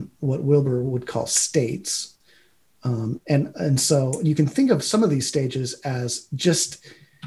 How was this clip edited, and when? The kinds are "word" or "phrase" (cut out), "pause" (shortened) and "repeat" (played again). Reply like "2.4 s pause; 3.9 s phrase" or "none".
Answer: none